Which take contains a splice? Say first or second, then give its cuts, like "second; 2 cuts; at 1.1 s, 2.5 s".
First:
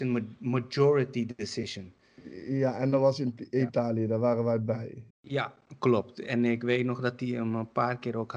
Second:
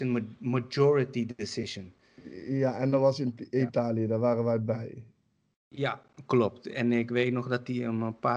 first; 1 cut; at 5.1 s